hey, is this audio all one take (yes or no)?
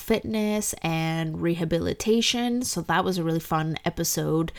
yes